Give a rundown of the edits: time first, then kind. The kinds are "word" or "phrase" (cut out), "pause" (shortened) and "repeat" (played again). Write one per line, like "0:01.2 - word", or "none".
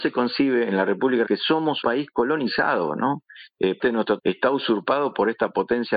0:01.3 - word
0:01.8 - word
0:03.8 - word
0:04.2 - word